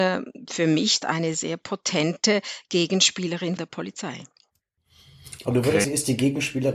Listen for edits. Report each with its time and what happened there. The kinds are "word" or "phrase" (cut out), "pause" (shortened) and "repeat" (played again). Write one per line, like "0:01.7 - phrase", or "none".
0:01.0 - word
0:01.3 - word
0:03.6 - word
0:05.8 - word